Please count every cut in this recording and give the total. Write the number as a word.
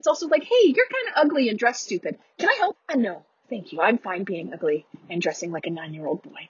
one